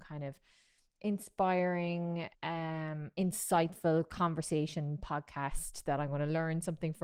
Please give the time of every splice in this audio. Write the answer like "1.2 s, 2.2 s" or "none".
2.3 s